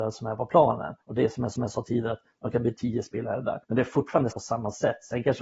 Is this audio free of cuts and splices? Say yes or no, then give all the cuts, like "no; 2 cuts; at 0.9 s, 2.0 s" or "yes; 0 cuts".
no; 5 cuts; at 1.0 s, 1.5 s, 2.8 s, 3.6 s, 4.3 s